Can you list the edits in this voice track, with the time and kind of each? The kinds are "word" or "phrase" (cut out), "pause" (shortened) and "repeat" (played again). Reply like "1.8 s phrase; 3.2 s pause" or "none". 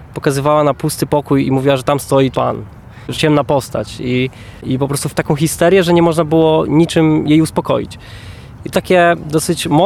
2.3 s word; 3.1 s word; 5.1 s word; 8.7 s word

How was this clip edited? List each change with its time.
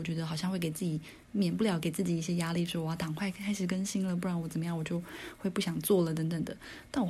1.2 s pause

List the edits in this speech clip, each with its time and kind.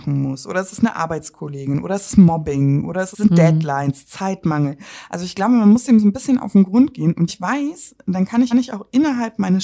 3.1 s word; 7.3 s word; 8.5 s repeat

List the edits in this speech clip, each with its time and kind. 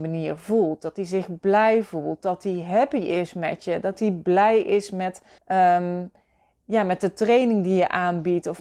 5.4 s pause

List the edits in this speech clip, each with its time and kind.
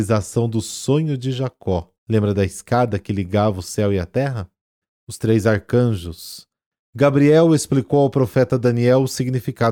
2.0 s pause; 4.8 s pause

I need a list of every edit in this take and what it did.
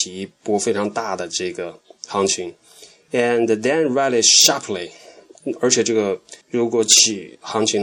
6.4 s pause

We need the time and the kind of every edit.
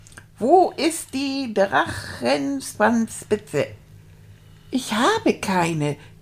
none

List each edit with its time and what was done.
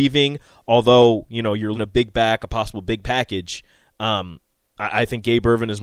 1.7 s word; 3.0 s word

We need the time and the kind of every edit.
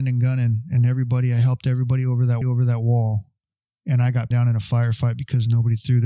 2.4 s repeat; 4.3 s word

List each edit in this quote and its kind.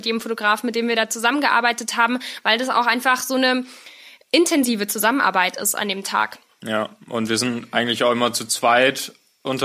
none

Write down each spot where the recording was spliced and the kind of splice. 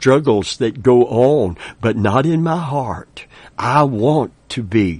none

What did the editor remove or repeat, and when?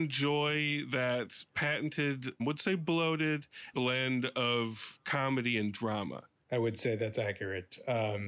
2.4 s word; 3.7 s word

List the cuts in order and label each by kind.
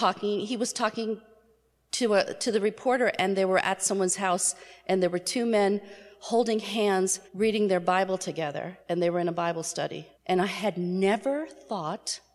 7.3 s pause; 8.8 s pause; 10.1 s pause

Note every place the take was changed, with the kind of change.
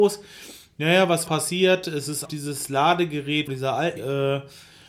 1.3 s word; 2.3 s word; 3.5 s word; 4.0 s word

